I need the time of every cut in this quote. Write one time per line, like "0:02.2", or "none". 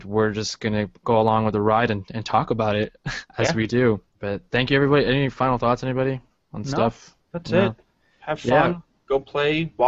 0:03.3
0:04.1

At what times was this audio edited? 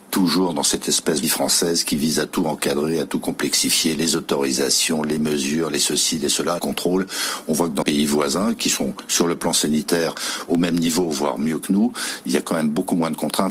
0:01.2
0:06.6
0:07.8

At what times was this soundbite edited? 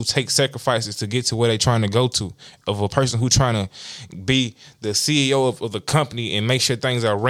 none

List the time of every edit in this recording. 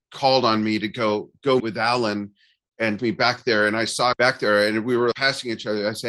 0:01.6
0:03.0
0:04.1
0:05.1

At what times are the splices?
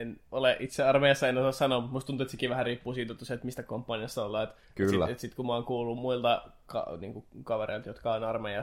0:04.6

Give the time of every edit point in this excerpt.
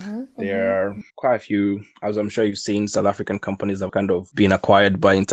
0:01.1
0:03.9

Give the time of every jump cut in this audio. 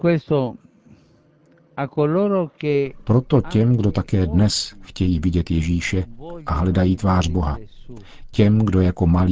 none

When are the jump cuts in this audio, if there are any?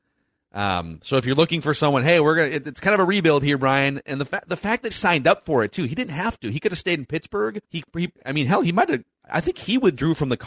0:04.9
0:07.6
0:08.1

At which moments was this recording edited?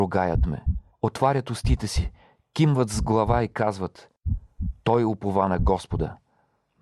none

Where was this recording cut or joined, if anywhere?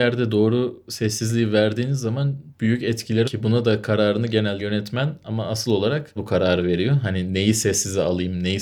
0:02.5
0:03.2
0:04.6
0:06.2

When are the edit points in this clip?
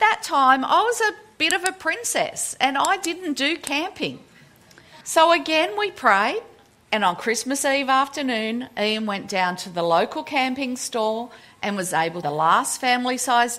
0:05.0
0:12.2

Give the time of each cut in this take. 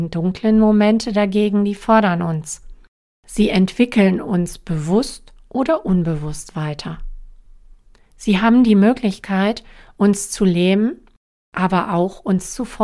none

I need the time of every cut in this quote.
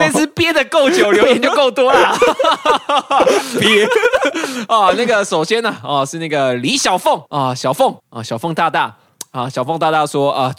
0:07.3
0:08.0

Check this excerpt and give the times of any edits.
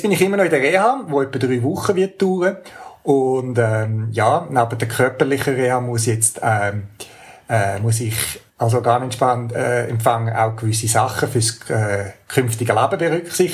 0:08.5

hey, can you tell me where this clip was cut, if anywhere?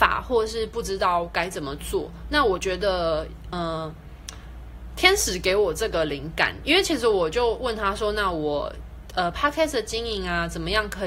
0:03.5

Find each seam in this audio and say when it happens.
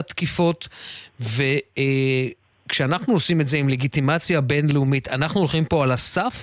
none

